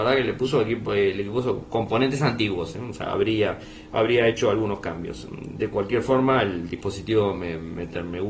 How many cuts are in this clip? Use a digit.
0